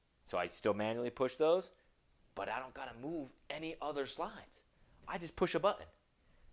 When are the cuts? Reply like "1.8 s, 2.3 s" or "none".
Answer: none

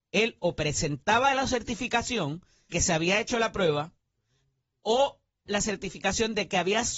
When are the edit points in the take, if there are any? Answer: 2.7 s, 5.5 s

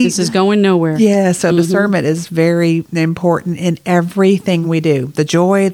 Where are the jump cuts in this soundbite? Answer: none

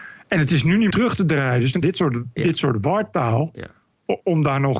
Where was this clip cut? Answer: 0.9 s, 1.8 s

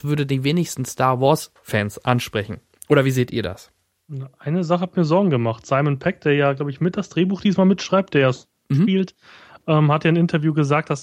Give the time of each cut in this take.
none

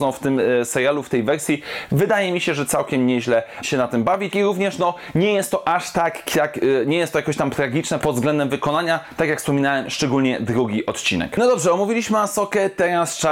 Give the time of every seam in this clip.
3.6 s, 4.3 s, 8.0 s

